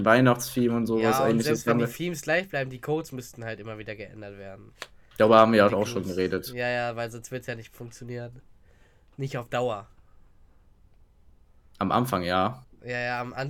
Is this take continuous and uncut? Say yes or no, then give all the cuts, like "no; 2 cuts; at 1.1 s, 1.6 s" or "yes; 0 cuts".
yes; 0 cuts